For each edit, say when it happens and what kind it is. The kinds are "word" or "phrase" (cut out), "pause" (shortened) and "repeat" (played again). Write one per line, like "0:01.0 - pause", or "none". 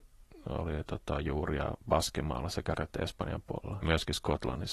0:01.8 - pause
0:02.8 - word
0:03.8 - word